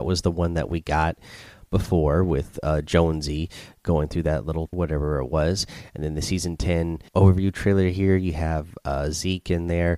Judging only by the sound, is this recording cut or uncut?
cut